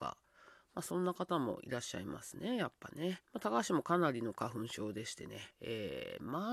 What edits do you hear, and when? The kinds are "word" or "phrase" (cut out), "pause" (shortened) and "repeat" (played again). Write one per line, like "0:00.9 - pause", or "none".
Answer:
0:03.2 - pause
0:05.5 - pause